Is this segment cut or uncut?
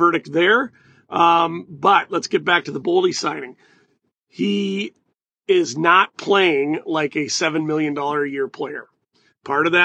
uncut